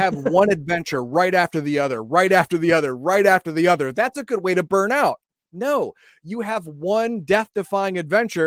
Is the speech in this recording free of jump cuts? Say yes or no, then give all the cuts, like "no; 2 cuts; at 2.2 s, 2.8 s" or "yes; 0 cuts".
yes; 0 cuts